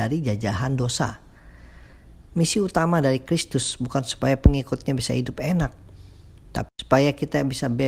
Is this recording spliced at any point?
no; 0 cuts

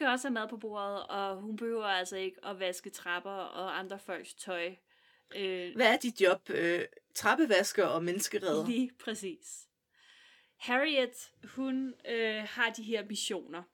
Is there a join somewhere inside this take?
no; 0 cuts

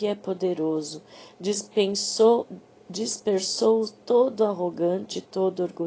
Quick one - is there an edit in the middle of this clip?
no; 0 cuts

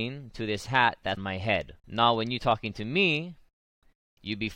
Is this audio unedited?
no; 2 cuts; at 1.2 s, 1.8 s

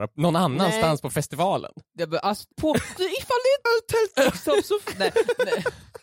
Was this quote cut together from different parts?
yes; 3 cuts; at 2.5 s, 3.0 s, 3.7 s

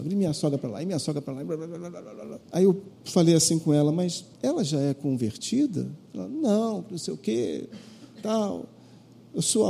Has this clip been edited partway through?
yes; 3 cuts; at 2.4 s, 2.9 s, 4.3 s

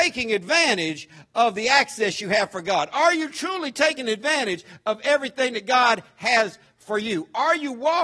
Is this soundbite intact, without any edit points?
yes; 0 cuts

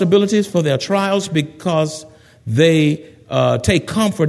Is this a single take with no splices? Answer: yes; 0 cuts

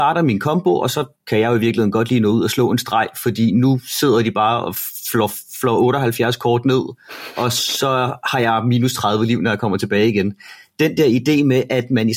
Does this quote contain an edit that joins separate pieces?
no; 0 cuts

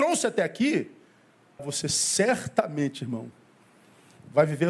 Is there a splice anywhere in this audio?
yes; 1 cut; at 1.6 s

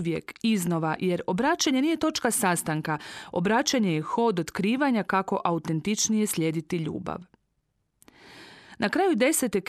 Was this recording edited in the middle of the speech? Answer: no; 0 cuts

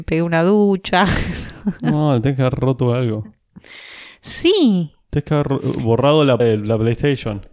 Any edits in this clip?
yes; 1 cut; at 6.4 s

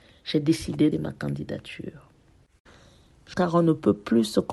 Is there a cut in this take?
yes; 2 cuts; at 0.9 s, 3.3 s

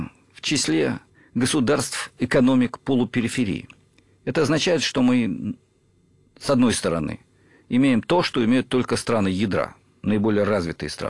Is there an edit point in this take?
yes; 1 cut; at 1.1 s

